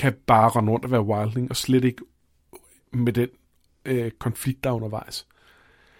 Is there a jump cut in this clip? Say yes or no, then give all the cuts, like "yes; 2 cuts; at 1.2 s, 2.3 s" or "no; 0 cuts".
no; 0 cuts